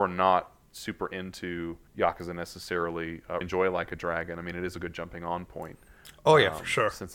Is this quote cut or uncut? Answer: cut